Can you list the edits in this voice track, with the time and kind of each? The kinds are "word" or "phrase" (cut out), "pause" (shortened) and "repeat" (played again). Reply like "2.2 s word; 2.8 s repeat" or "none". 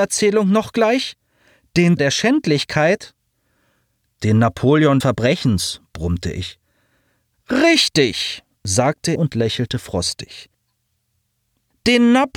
2.0 s word; 5.0 s word; 9.2 s word